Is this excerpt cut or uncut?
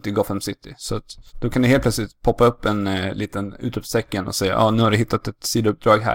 cut